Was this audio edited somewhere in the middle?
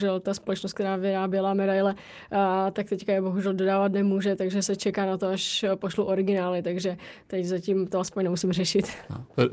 no; 0 cuts

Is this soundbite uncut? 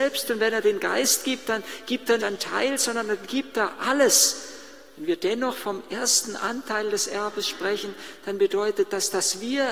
no; 1 cut; at 2.2 s

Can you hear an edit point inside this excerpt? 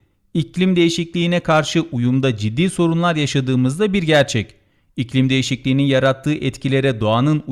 no; 0 cuts

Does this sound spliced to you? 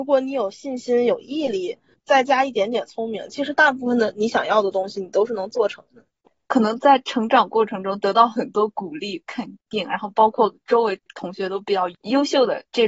no; 0 cuts

